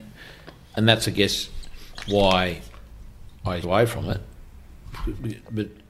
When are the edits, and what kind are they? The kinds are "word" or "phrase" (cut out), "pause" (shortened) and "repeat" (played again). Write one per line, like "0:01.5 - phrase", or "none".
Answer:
0:03.6 - word